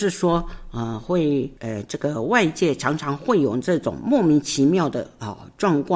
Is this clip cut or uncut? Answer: cut